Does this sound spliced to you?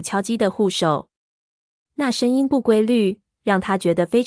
no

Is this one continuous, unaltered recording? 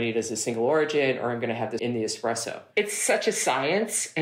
no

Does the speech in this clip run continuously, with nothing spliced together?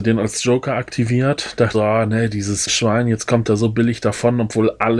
no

